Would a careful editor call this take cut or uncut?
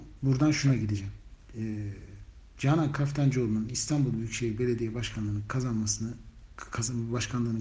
uncut